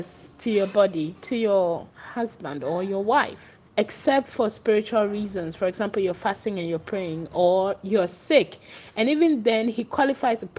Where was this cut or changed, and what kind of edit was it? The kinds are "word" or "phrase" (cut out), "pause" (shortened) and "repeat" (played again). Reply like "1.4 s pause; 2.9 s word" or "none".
1.2 s pause; 1.9 s pause; 3.7 s pause